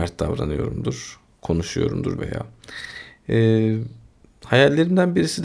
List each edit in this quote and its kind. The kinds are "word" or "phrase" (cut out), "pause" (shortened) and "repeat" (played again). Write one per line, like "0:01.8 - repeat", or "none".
0:02.2 - word